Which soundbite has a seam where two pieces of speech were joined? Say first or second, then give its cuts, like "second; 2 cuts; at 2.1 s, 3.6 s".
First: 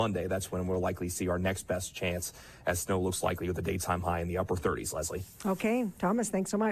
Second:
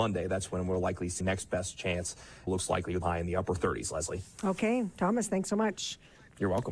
second; 3 cuts; at 1.2 s, 2.5 s, 3.0 s